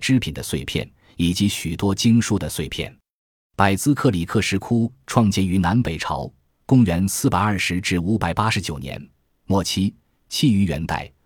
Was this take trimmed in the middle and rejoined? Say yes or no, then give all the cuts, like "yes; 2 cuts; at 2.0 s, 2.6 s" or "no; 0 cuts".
no; 0 cuts